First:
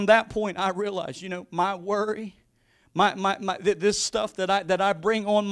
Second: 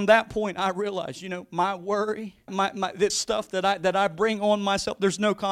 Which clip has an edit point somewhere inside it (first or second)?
second